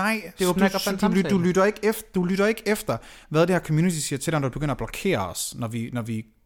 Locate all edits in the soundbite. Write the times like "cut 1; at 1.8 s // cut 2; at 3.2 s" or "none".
none